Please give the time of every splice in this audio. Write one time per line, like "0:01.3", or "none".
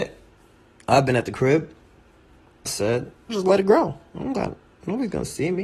0:02.7
0:03.3

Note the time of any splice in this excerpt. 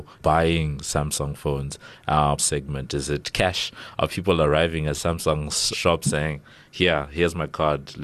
0:02.4
0:05.7
0:06.0

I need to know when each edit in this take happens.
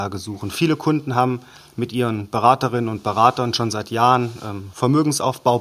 none

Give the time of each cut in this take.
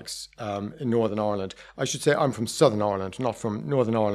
none

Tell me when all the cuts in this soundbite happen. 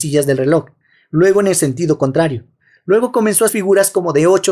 0:03.5

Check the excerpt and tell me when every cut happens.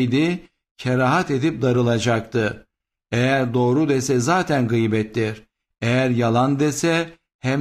none

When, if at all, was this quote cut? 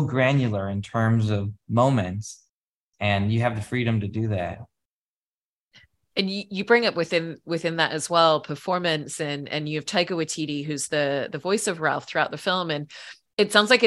none

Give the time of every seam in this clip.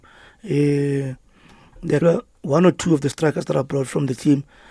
0:02.0

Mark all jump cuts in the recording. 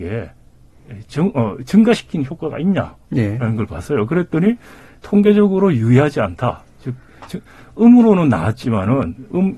none

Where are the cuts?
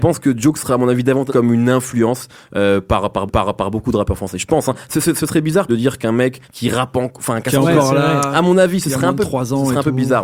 0:01.3
0:03.3
0:05.7
0:06.4

